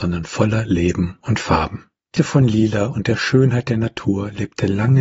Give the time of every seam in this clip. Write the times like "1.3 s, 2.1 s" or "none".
2.1 s